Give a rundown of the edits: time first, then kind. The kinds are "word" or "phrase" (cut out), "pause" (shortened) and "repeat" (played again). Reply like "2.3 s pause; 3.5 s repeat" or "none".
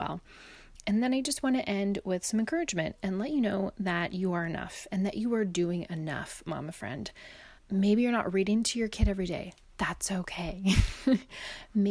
7.6 s pause